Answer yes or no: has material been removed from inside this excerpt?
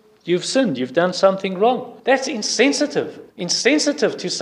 yes